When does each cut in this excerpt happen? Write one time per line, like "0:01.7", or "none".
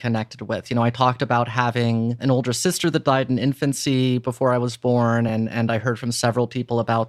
none